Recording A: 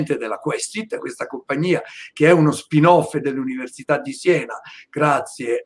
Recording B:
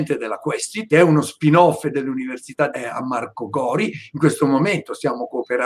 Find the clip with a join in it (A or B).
B